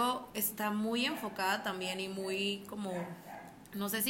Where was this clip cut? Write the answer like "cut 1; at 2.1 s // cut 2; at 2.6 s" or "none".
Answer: none

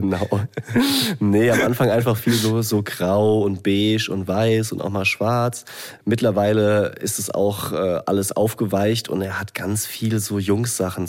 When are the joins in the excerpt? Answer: none

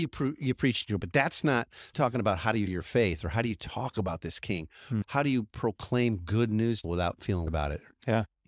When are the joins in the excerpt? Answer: cut 1; at 1.0 s // cut 2; at 1.9 s // cut 3; at 2.7 s // cut 4; at 6.8 s // cut 5; at 7.5 s

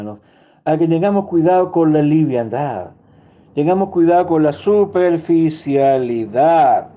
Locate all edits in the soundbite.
none

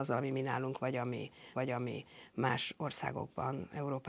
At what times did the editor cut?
cut 1; at 1.5 s

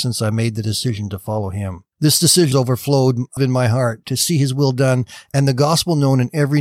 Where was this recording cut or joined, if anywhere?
cut 1; at 1.9 s // cut 2; at 2.5 s // cut 3; at 3.4 s

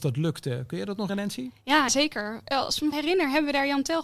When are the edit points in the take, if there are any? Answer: cut 1; at 1.1 s // cut 2; at 1.9 s // cut 3; at 2.9 s

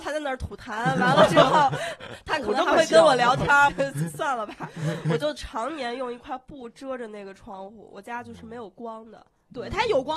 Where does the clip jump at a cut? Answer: cut 1; at 3.7 s

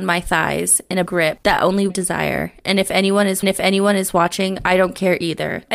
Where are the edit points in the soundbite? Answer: cut 1; at 1.1 s // cut 2; at 1.9 s // cut 3; at 3.4 s

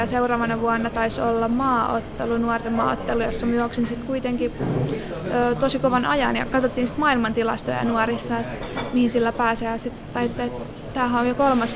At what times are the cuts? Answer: none

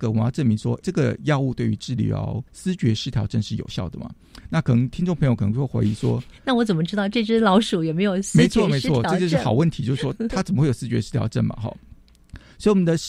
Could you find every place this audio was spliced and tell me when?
cut 1; at 2.5 s // cut 2; at 12.0 s

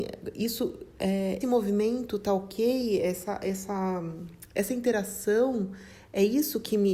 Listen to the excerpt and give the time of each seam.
cut 1; at 1.4 s

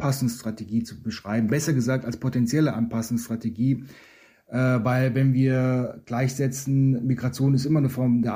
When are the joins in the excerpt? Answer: none

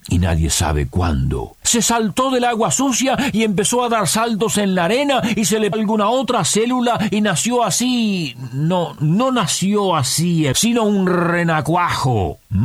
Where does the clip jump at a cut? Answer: cut 1; at 1.6 s // cut 2; at 5.7 s // cut 3; at 9.0 s // cut 4; at 10.5 s

